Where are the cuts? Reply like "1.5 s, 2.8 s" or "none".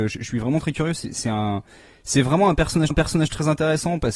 2.9 s